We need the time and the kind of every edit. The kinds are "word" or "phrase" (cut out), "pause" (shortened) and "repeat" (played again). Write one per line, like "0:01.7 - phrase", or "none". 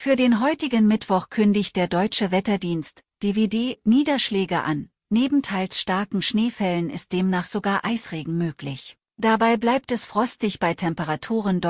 0:09.1 - pause